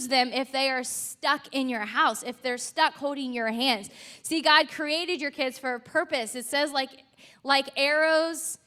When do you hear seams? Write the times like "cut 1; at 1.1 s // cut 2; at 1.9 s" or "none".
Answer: none